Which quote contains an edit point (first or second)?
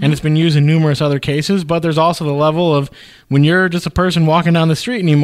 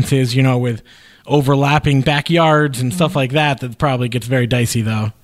second